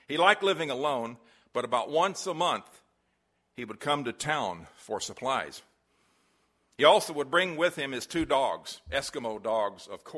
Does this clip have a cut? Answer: no; 0 cuts

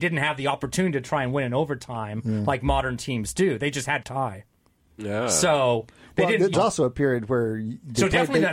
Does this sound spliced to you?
yes; 2 cuts; at 4.0 s, 6.5 s

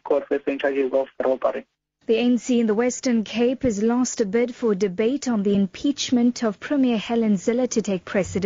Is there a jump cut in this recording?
no; 0 cuts

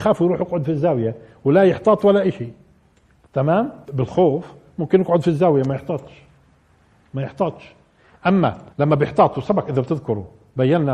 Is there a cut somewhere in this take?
yes; 2 cuts; at 3.8 s, 8.7 s

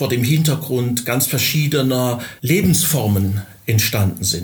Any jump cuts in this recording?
yes; 1 cut; at 2.4 s

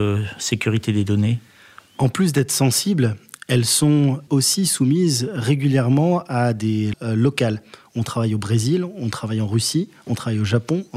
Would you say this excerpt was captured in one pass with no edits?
no; 2 cuts; at 4.3 s, 6.9 s

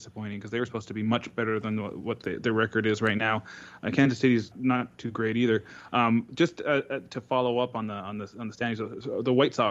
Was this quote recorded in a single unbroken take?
no; 1 cut; at 4.5 s

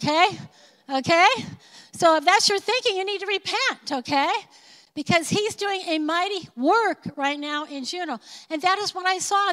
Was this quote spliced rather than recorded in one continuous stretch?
no; 0 cuts

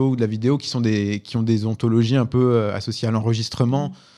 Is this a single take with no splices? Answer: yes; 0 cuts

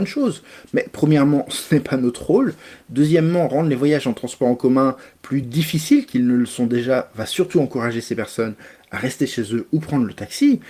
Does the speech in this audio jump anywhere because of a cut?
no; 0 cuts

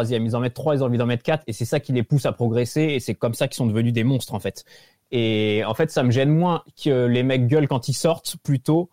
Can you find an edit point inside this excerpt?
no; 0 cuts

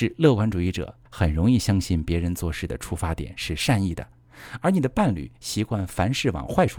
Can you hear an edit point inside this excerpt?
yes; 1 cut; at 1.1 s

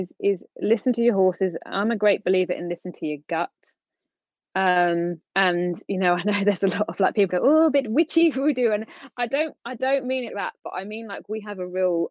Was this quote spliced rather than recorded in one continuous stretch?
yes; 3 cuts; at 5.3 s, 7.3 s, 10.3 s

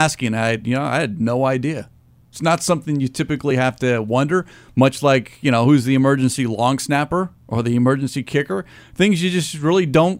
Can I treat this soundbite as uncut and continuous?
yes; 0 cuts

